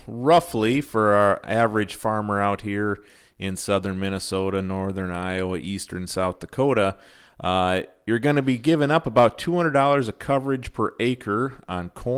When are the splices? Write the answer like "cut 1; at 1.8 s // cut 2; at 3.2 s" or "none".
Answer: none

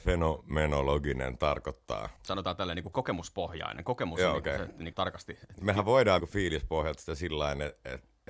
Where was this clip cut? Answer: cut 1; at 2.2 s // cut 2; at 2.9 s // cut 3; at 4.9 s // cut 4; at 5.6 s // cut 5; at 6.2 s

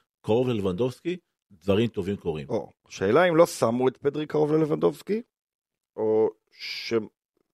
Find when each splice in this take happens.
none

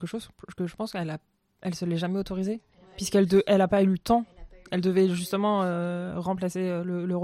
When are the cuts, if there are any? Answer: none

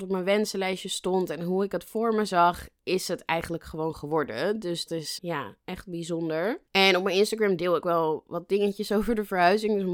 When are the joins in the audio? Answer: cut 1; at 4.9 s // cut 2; at 5.2 s // cut 3; at 6.7 s // cut 4; at 7.8 s

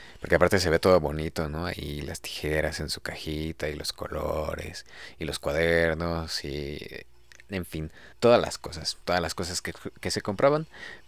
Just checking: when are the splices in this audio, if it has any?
cut 1; at 8.1 s

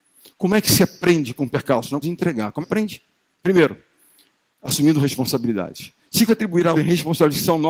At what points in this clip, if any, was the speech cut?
cut 1; at 1.4 s // cut 2; at 2.0 s // cut 3; at 2.6 s // cut 4; at 3.2 s // cut 5; at 6.3 s // cut 6; at 6.7 s

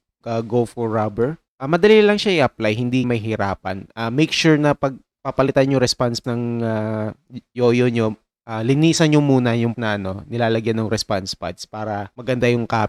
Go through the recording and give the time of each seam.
cut 1; at 1.5 s // cut 2; at 3.0 s // cut 3; at 6.2 s // cut 4; at 9.7 s

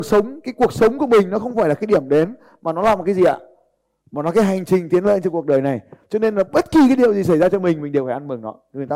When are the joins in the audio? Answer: none

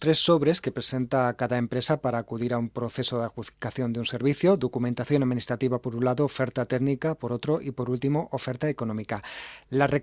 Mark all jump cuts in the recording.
none

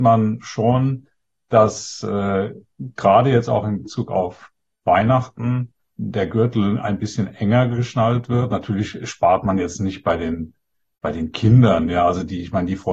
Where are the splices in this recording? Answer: none

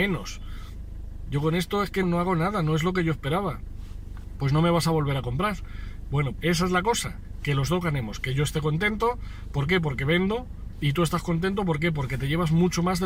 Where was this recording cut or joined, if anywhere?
cut 1; at 2.0 s // cut 2; at 6.3 s

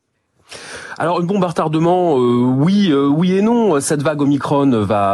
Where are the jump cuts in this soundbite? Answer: none

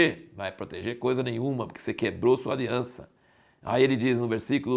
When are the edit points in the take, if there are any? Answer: none

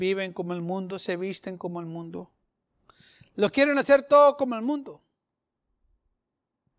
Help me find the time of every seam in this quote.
none

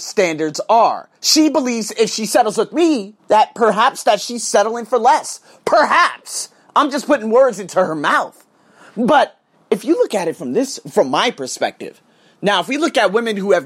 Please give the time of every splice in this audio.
cut 1; at 3.2 s

